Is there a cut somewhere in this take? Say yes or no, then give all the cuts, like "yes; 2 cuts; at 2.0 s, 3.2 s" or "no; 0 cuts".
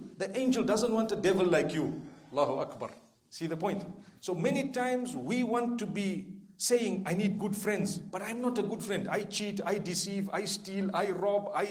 yes; 2 cuts; at 3.1 s, 4.2 s